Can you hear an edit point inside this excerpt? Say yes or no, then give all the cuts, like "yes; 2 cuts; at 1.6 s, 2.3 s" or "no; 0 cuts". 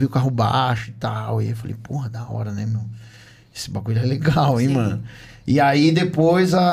no; 0 cuts